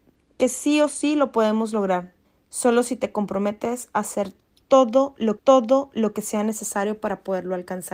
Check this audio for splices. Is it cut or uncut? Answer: cut